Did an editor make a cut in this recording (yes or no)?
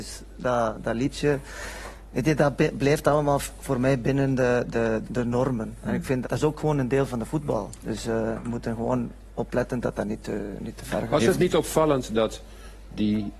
yes